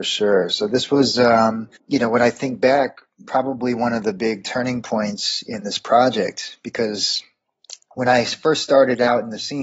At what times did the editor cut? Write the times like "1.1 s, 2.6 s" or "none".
1.8 s